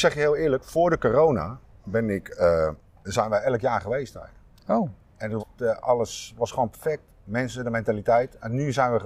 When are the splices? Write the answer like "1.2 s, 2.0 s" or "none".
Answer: 3.0 s, 5.4 s